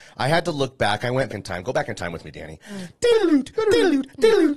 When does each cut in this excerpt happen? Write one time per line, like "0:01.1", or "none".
0:01.3